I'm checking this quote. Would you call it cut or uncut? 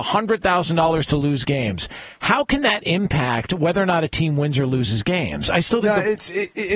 uncut